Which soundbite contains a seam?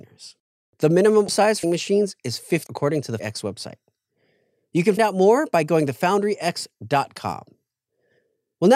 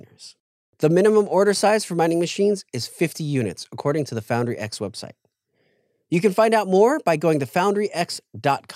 first; 5 cuts; at 1.3 s, 1.6 s, 2.7 s, 3.2 s, 5.0 s

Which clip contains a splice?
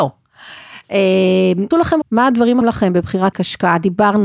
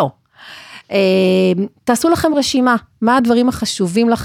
first; 4 cuts; at 1.7 s, 2.0 s, 2.6 s, 3.3 s

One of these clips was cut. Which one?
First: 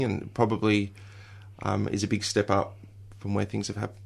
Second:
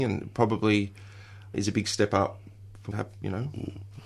second; 2 cuts; at 1.5 s, 2.9 s

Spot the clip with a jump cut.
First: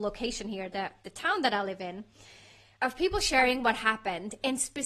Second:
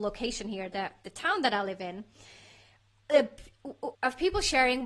first; 1 cut; at 2.8 s

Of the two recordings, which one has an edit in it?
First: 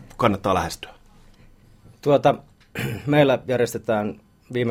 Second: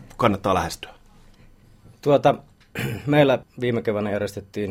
second; 1 cut; at 3.4 s

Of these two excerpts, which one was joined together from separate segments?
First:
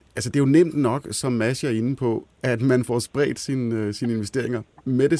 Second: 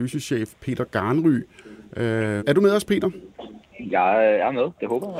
second; 2 cuts; at 2.4 s, 3.6 s

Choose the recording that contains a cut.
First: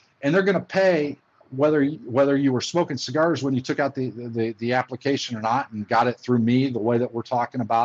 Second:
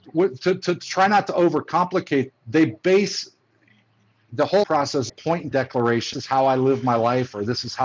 second; 6 cuts; at 2.3 s, 4.3 s, 4.6 s, 5.1 s, 5.5 s, 6.1 s

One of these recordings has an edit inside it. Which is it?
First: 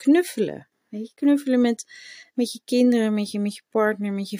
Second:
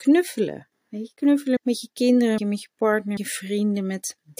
second; 3 cuts; at 1.6 s, 2.4 s, 3.2 s

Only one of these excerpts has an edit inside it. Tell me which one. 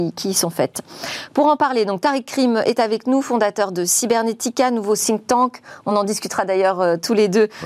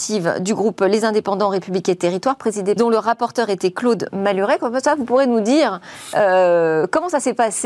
second; 1 cut; at 2.8 s

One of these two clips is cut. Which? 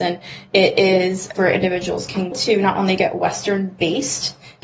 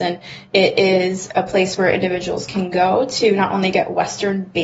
first; 2 cuts; at 1.4 s, 2.3 s

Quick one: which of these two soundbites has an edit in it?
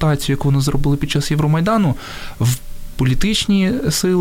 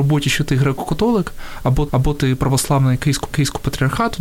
second; 2 cuts; at 1.9 s, 3.3 s

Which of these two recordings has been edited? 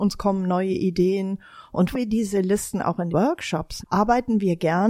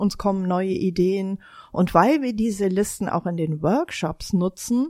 first; 3 cuts; at 1.9 s, 3.1 s, 3.8 s

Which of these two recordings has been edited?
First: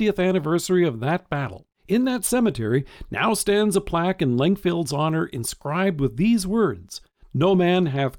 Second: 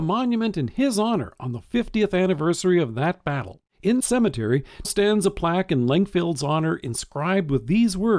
second; 2 cuts; at 4.0 s, 4.8 s

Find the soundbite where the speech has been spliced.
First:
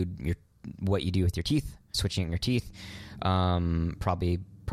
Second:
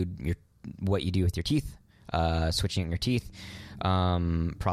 first; 1 cut; at 1.9 s

